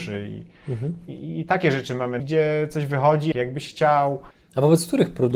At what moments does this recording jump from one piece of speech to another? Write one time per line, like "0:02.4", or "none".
0:02.2
0:03.3
0:04.3

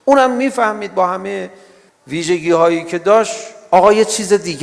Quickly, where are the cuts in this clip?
0:01.9

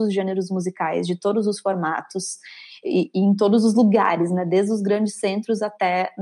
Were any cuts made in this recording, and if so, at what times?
0:02.8

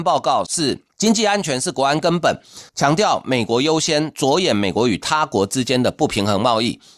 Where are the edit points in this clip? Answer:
0:00.9
0:02.7

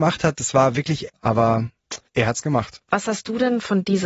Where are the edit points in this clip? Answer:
0:01.1
0:02.1
0:02.8

